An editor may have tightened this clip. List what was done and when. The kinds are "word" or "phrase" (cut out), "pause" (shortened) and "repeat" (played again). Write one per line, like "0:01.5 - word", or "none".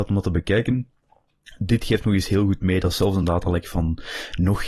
none